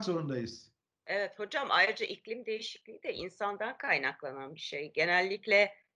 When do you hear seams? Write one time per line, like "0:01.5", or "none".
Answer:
none